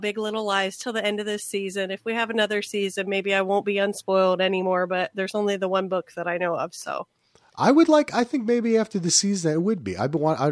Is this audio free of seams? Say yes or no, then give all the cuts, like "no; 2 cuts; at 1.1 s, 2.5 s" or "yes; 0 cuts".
yes; 0 cuts